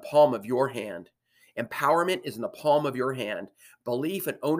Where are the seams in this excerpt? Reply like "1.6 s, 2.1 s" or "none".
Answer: none